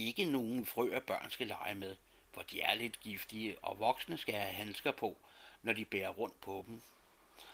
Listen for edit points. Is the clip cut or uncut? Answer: uncut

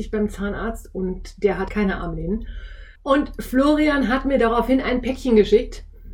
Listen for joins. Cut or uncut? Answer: cut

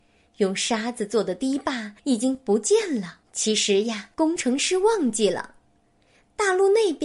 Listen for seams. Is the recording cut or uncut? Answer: cut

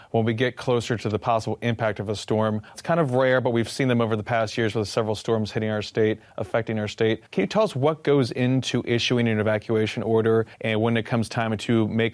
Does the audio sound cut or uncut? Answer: cut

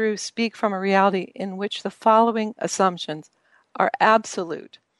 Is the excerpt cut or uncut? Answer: uncut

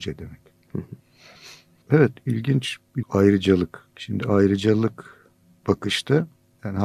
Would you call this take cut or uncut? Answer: cut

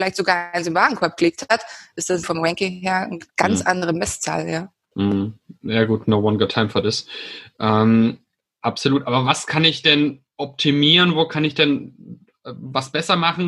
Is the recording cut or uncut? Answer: cut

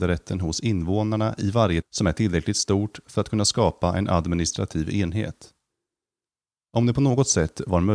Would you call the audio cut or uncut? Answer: cut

